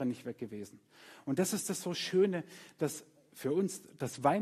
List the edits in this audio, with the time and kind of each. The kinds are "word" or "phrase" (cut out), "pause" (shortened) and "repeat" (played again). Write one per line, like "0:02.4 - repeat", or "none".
none